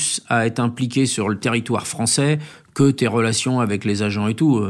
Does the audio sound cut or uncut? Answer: uncut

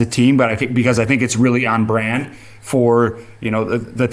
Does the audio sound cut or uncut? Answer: uncut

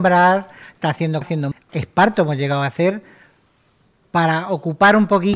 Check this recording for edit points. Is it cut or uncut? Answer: cut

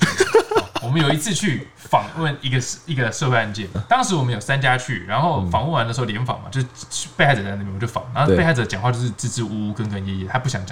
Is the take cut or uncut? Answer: cut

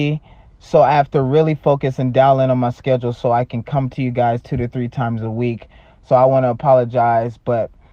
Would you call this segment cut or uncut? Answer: uncut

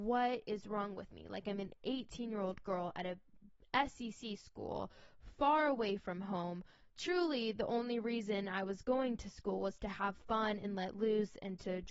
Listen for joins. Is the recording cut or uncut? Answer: uncut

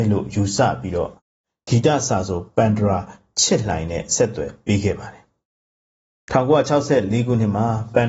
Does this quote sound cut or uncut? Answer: uncut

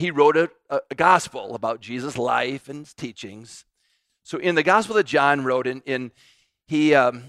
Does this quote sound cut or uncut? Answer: uncut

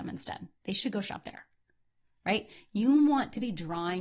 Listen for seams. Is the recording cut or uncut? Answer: uncut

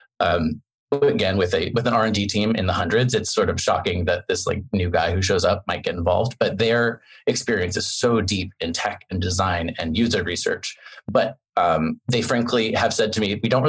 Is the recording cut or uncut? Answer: uncut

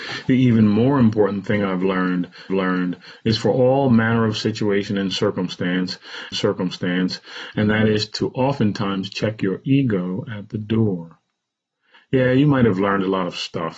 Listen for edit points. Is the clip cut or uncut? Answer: cut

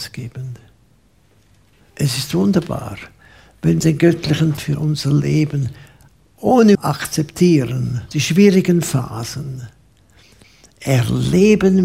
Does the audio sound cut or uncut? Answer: cut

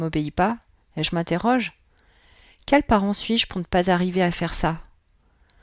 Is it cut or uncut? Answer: uncut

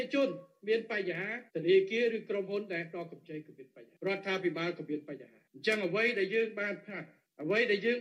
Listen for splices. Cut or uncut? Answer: cut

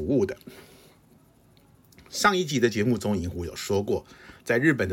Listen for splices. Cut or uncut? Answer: uncut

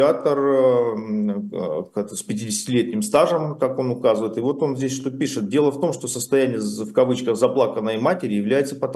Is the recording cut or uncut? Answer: uncut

